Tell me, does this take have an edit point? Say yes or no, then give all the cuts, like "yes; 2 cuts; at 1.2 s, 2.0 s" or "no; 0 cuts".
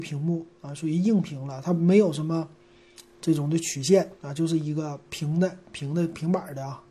no; 0 cuts